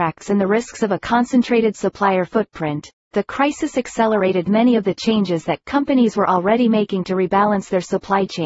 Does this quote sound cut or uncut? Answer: uncut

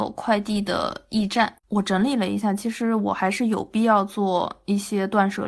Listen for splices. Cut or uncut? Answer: cut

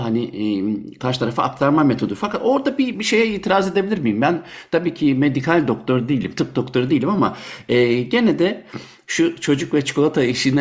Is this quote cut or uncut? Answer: cut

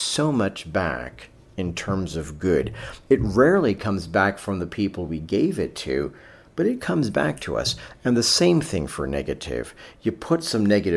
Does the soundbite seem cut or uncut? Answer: uncut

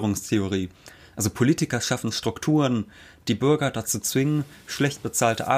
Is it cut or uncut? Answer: uncut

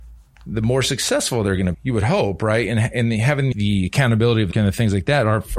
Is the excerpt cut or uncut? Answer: cut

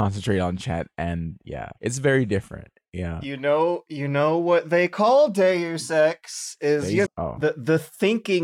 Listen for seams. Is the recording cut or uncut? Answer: cut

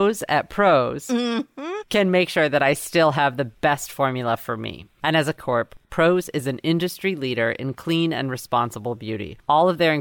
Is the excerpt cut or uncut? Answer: cut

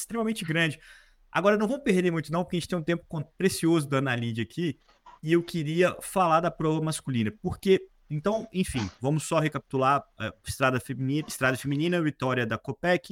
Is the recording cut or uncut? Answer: uncut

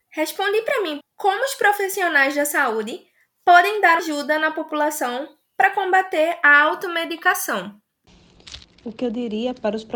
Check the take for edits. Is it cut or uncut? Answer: cut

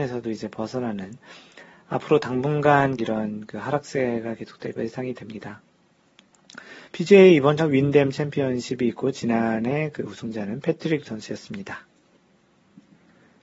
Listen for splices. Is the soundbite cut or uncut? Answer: cut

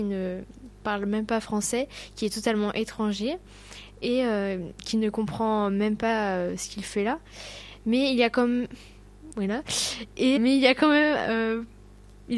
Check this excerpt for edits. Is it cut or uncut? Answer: cut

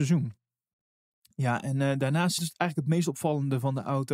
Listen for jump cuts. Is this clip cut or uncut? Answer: cut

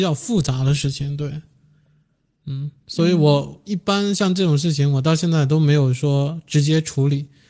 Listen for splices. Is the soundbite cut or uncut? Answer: uncut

